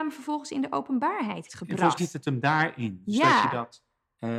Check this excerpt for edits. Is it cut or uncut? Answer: cut